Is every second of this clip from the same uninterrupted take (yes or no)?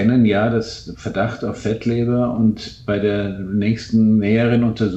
yes